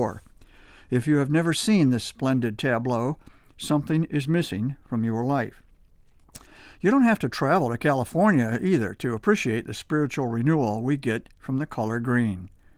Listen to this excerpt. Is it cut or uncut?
uncut